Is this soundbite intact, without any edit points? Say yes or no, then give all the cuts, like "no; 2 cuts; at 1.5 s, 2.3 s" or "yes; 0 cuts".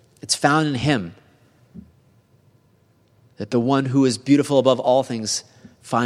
yes; 0 cuts